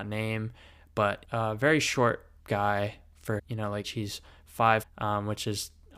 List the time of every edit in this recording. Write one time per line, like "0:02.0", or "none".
0:01.2
0:02.4
0:03.4
0:03.8
0:04.8